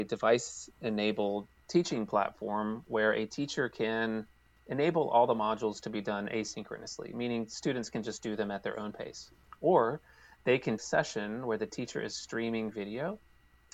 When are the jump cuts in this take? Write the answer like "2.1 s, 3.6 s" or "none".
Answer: 10.8 s